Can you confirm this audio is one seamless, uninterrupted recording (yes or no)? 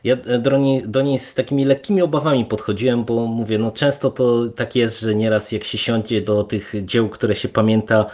yes